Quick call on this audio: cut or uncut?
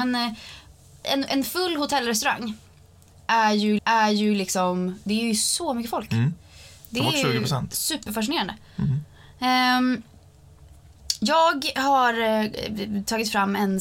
cut